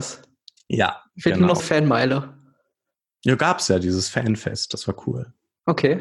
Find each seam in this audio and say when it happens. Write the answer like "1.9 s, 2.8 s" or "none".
1.6 s